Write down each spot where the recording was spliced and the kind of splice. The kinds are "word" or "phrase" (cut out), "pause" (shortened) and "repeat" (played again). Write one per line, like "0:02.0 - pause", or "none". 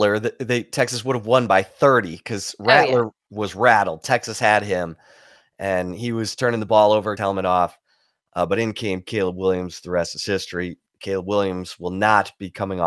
0:07.2 - phrase